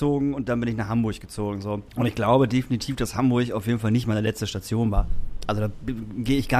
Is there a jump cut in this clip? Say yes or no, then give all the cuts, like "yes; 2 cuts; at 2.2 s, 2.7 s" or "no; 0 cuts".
yes; 1 cut; at 1.9 s